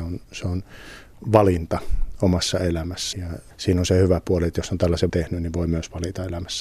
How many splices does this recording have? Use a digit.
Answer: 3